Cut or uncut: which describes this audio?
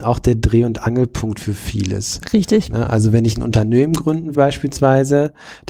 cut